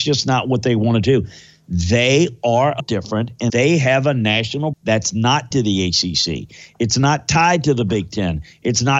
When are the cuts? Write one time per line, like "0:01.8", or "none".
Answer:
0:02.8
0:03.5
0:04.7
0:05.5